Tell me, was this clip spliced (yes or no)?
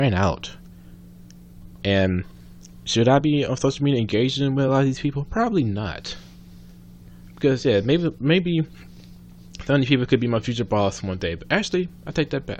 no